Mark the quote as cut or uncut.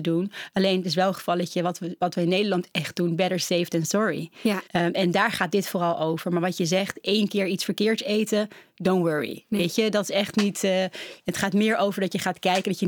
cut